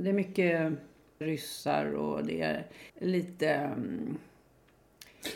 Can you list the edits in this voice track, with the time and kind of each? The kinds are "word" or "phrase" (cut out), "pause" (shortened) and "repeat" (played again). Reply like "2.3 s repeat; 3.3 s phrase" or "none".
1.2 s word; 2.9 s pause